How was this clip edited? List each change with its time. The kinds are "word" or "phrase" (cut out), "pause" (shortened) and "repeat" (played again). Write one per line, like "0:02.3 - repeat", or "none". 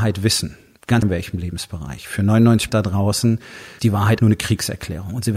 0:01.0 - word
0:02.7 - word
0:03.8 - word
0:04.2 - word